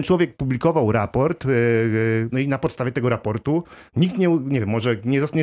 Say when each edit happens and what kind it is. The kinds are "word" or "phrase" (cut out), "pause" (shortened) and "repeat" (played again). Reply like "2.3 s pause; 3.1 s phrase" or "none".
2.3 s word